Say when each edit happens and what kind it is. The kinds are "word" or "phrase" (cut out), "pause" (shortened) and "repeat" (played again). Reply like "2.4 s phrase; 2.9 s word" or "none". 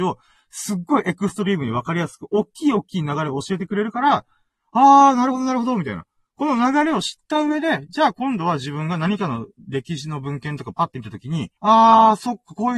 11.6 s pause